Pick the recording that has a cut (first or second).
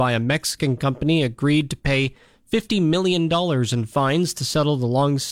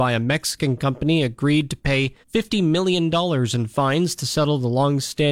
second